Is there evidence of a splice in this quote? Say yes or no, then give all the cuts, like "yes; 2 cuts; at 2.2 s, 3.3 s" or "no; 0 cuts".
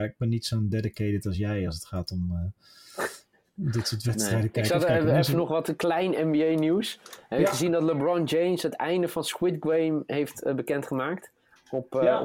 no; 0 cuts